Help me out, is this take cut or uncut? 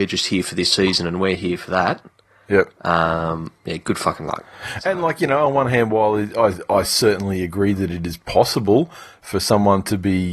uncut